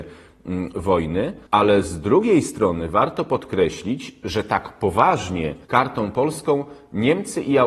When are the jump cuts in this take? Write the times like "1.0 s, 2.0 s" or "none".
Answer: 1.5 s, 5.6 s